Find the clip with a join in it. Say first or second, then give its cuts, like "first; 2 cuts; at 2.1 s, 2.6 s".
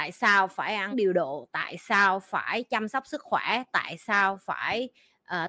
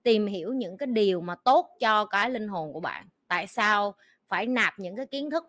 first; 1 cut; at 0.9 s